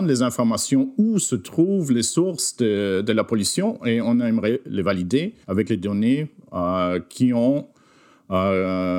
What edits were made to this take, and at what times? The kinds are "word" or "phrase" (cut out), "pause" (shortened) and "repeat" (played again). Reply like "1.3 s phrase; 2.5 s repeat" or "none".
5.4 s pause